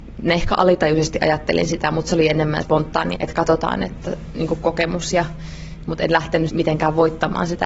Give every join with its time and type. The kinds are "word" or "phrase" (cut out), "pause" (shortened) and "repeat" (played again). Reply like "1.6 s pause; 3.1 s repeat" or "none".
2.6 s phrase; 3.1 s word; 6.5 s word